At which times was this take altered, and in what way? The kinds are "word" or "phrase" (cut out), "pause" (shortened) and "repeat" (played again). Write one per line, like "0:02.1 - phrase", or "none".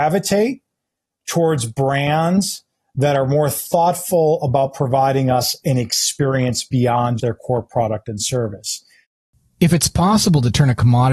0:07.2 - word